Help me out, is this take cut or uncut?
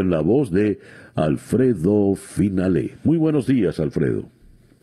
uncut